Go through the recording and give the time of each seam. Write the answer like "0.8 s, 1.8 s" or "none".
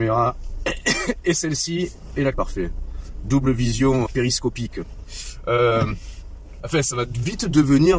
2.3 s, 4.0 s, 6.6 s

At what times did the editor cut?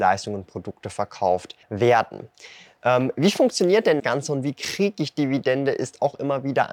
1.6 s, 4.0 s

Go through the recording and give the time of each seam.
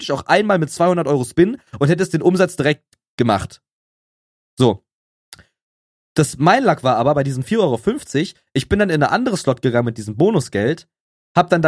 none

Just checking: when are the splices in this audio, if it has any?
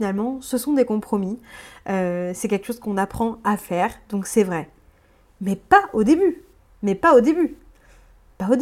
none

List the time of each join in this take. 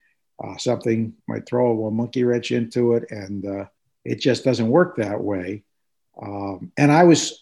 1.2 s, 3.8 s

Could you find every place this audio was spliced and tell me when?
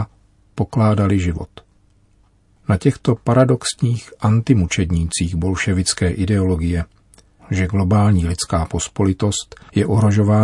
7.4 s

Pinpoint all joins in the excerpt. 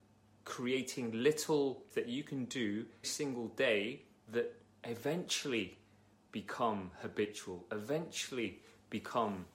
1.9 s, 3.0 s

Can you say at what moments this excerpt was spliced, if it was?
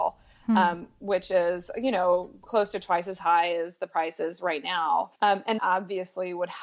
5.2 s, 5.6 s

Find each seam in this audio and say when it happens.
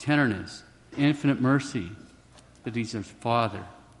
0.9 s, 2.6 s

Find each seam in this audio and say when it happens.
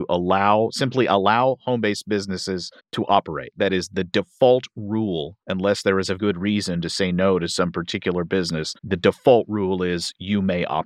2.8 s, 5.4 s, 6.2 s, 8.8 s

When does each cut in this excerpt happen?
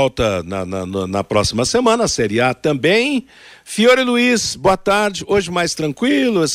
none

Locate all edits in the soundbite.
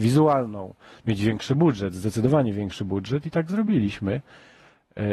none

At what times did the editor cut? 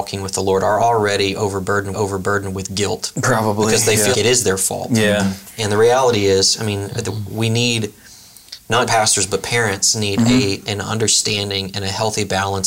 1.9 s, 4.1 s, 8.9 s

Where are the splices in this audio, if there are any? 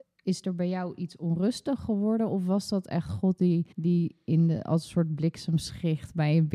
3.7 s

